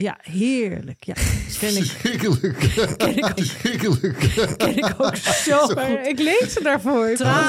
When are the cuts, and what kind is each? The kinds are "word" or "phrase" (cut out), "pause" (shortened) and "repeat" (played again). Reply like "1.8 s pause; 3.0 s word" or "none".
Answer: 3.4 s repeat